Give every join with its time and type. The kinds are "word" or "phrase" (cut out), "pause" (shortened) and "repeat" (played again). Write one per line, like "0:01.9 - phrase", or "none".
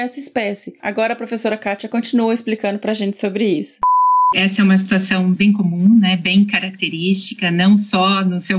none